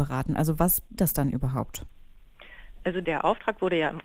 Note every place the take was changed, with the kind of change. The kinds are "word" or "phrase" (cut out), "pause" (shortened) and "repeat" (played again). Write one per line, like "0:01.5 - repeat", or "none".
0:01.0 - word